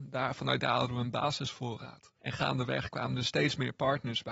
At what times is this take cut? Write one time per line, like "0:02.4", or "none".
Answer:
0:02.1